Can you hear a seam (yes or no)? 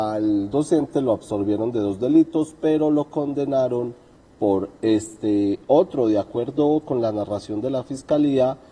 no